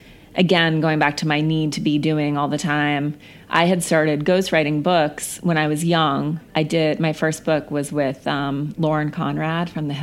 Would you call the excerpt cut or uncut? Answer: cut